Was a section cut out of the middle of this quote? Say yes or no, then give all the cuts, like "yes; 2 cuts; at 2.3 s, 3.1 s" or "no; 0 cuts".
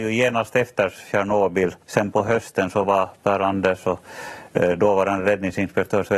yes; 1 cut; at 1.8 s